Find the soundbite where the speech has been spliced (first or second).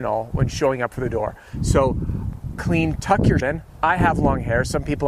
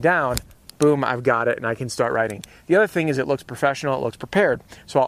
first